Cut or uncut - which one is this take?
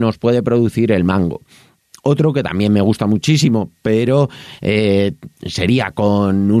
uncut